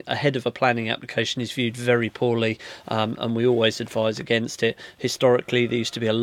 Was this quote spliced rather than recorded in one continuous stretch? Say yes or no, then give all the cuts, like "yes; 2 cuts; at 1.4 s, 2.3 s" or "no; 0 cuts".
no; 0 cuts